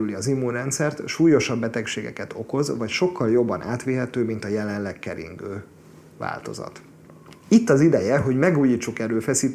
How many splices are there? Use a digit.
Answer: 0